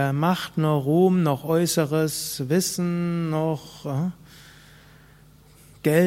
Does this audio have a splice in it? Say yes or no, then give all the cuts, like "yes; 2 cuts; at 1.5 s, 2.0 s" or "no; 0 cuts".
no; 0 cuts